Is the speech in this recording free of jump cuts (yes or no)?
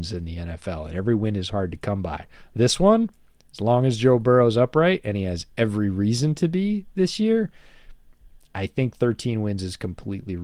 yes